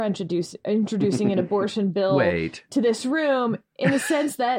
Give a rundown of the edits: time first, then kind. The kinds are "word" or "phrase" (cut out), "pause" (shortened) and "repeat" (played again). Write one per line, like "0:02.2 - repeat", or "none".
none